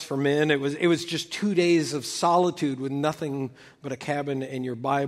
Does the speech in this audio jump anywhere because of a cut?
no; 0 cuts

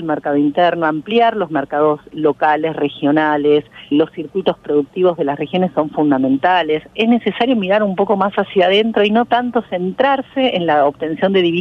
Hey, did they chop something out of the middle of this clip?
yes; 1 cut; at 3.9 s

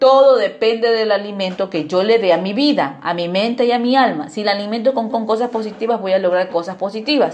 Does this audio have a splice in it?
yes; 1 cut; at 5.1 s

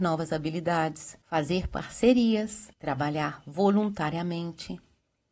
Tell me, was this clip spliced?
yes; 2 cuts; at 1.2 s, 2.7 s

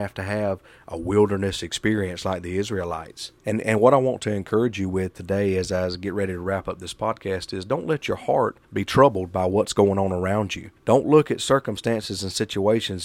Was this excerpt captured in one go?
no; 3 cuts; at 3.4 s, 8.6 s, 10.8 s

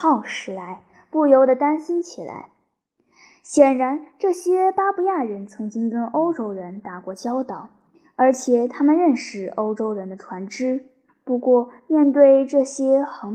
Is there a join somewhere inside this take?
yes; 1 cut; at 11.1 s

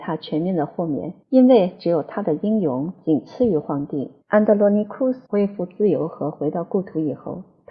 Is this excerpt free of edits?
no; 3 cuts; at 1.2 s, 4.2 s, 5.2 s

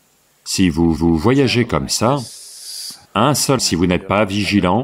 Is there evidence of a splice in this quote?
yes; 3 cuts; at 1.0 s, 3.0 s, 3.6 s

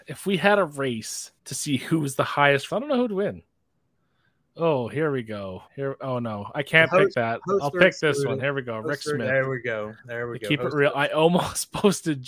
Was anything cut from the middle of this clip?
yes; 3 cuts; at 1.4 s, 2.7 s, 5.7 s

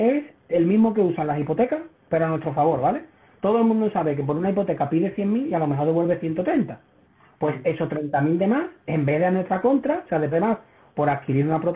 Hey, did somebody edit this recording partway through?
yes; 1 cut; at 10.3 s

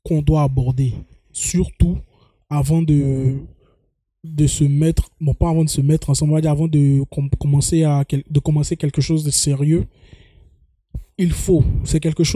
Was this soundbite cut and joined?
no; 0 cuts

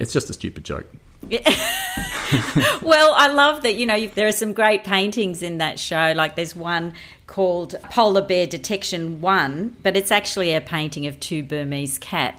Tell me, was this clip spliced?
no; 0 cuts

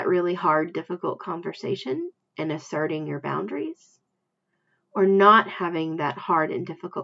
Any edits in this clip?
no; 0 cuts

